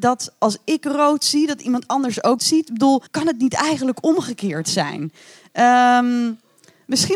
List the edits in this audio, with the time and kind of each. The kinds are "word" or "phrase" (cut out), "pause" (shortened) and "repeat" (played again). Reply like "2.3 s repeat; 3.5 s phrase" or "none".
2.4 s word; 3.1 s pause